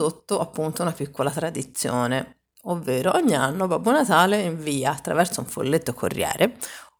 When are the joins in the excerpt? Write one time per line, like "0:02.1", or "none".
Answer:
none